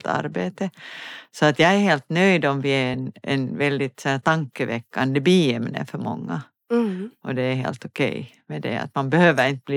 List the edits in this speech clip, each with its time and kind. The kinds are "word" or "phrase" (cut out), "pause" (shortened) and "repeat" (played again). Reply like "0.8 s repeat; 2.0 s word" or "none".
none

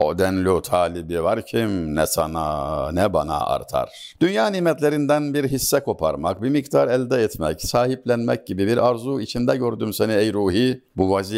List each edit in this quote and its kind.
none

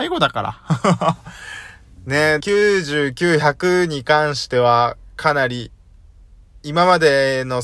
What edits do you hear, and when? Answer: 2.4 s word

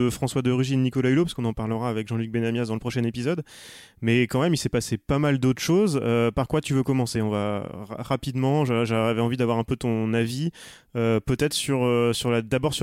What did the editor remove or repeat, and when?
none

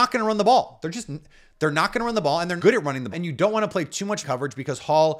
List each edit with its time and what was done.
2.6 s word; 3.1 s word; 4.2 s word

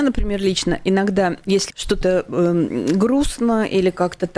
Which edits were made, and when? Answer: 1.7 s phrase

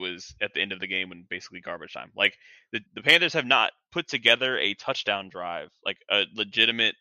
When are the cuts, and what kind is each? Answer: 2.9 s pause

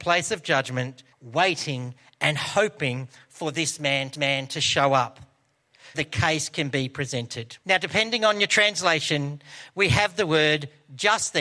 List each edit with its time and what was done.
1.1 s pause; 4.1 s repeat; 5.9 s word; 7.6 s pause

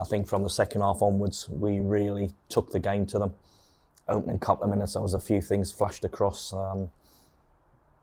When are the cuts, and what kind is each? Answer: none

